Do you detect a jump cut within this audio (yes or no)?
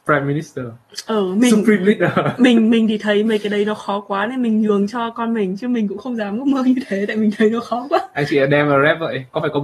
no